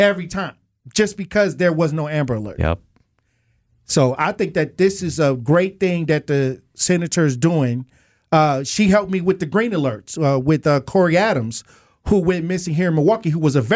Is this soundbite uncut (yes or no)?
yes